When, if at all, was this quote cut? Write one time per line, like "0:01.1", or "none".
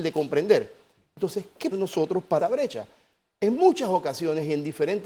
0:01.7
0:02.4